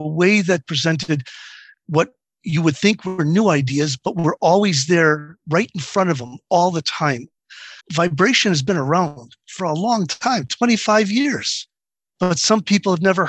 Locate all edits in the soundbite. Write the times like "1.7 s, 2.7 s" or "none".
7.8 s